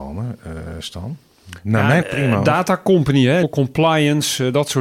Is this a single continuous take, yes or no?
no